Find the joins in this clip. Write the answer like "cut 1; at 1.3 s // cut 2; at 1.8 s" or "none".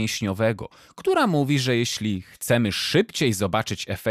none